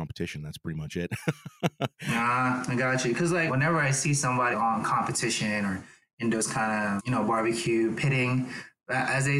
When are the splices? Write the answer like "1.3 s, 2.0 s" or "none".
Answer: 3.5 s, 4.5 s, 7.0 s